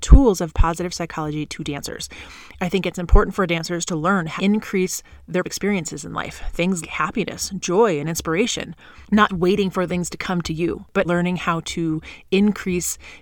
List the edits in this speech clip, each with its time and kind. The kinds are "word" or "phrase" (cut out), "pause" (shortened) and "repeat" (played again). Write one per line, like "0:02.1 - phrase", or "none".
0:04.4 - word
0:05.4 - word
0:06.8 - word
0:09.3 - word
0:09.9 - word
0:11.0 - word